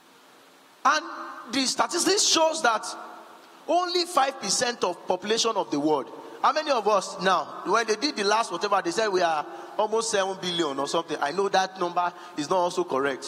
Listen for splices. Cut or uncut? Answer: uncut